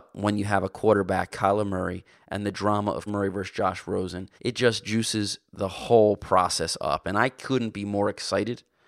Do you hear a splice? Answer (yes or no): yes